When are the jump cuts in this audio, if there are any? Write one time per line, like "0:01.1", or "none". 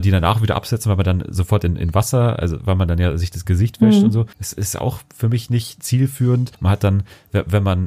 0:04.3
0:06.5